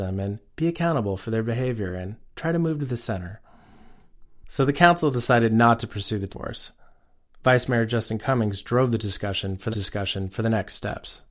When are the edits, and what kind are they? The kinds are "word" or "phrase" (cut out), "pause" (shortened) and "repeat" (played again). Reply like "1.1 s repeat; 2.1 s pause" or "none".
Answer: 6.3 s word; 9.7 s repeat